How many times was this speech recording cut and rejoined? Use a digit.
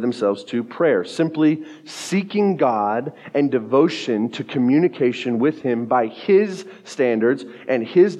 0